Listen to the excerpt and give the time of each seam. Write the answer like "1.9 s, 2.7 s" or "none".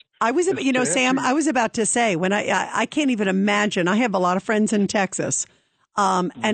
none

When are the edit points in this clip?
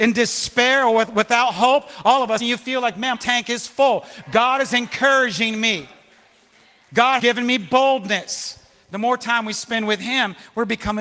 2.4 s, 3.1 s, 7.2 s

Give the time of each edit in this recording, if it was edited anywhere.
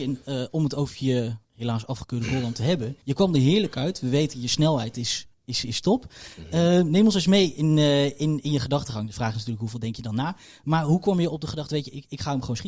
1.4 s, 3.0 s, 5.3 s

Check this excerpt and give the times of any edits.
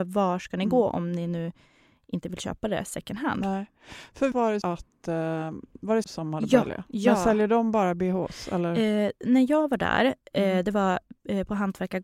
4.3 s, 4.6 s, 6.0 s, 6.6 s

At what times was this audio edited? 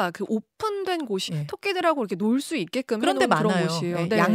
1.3 s

